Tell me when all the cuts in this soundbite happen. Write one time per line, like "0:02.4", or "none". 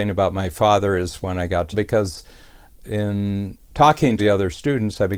0:01.7
0:04.2